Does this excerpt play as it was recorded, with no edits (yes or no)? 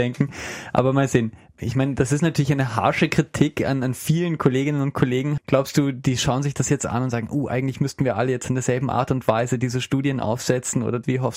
yes